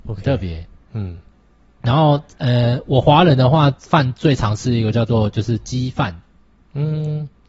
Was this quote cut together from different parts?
no; 0 cuts

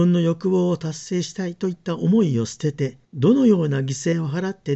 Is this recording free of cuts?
no; 1 cut; at 3.0 s

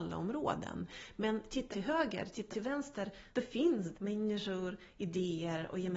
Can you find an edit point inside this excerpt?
yes; 4 cuts; at 1.7 s, 2.5 s, 3.3 s, 3.9 s

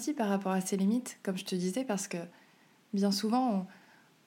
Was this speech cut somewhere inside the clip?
no; 0 cuts

